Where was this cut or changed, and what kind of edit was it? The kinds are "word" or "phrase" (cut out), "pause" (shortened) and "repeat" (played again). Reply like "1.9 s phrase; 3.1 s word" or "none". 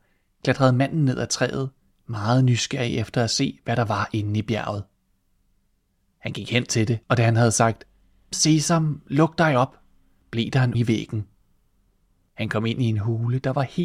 7.0 s pause; 8.3 s word; 10.7 s word